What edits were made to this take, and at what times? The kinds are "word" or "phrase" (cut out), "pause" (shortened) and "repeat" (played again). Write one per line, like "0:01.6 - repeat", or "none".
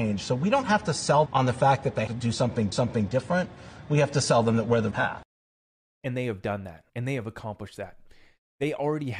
0:01.3 - word
0:02.1 - word
0:02.7 - repeat
0:04.9 - word
0:05.8 - pause
0:06.9 - pause